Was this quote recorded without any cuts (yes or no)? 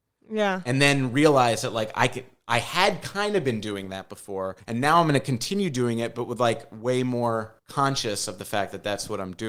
no